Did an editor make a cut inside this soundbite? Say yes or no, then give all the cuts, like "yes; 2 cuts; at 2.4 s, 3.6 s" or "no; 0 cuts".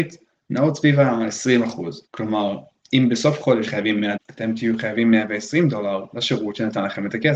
yes; 3 cuts; at 2.1 s, 3.7 s, 4.2 s